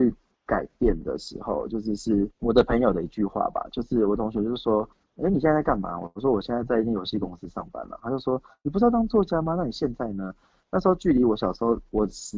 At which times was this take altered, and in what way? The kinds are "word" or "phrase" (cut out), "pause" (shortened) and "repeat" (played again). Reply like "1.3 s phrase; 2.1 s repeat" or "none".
4.9 s pause